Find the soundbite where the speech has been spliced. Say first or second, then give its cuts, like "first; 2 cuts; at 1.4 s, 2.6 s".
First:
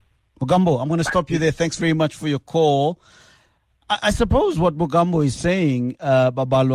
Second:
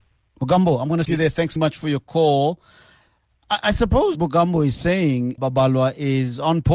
second; 4 cuts; at 1.0 s, 1.6 s, 4.1 s, 5.4 s